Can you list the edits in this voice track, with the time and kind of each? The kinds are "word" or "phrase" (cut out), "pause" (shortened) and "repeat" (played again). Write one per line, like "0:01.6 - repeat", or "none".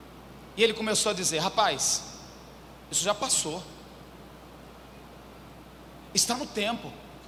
none